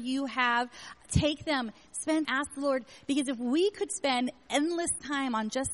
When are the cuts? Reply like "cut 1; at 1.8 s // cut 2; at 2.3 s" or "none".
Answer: cut 1; at 2.2 s